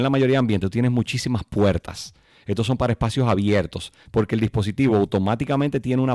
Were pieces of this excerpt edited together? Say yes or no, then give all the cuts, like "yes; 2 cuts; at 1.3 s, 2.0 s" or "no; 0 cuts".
no; 0 cuts